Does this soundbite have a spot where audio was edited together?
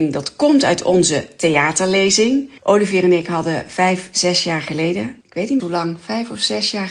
yes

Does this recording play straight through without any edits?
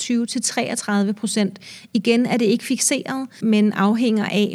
no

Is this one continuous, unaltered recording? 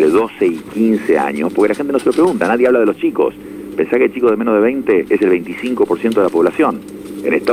yes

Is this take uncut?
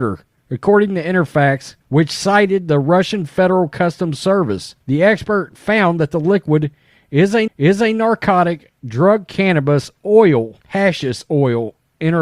no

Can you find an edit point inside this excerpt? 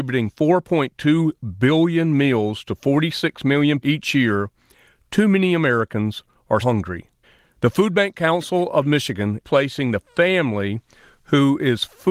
yes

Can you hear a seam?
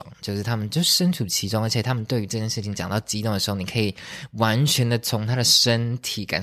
no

